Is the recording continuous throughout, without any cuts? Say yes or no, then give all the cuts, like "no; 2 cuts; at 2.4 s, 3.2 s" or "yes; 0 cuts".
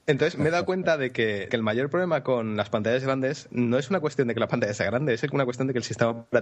no; 1 cut; at 1.5 s